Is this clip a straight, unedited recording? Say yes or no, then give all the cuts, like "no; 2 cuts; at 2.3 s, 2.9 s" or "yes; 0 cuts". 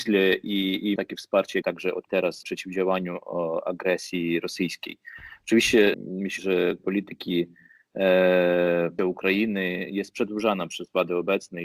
no; 8 cuts; at 1.0 s, 1.6 s, 2.1 s, 2.4 s, 5.9 s, 6.4 s, 6.8 s, 9.0 s